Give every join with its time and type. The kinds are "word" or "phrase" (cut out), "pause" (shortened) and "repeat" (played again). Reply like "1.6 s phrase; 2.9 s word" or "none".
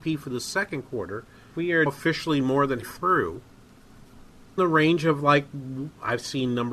1.5 s word; 1.9 s word; 2.8 s word; 4.6 s word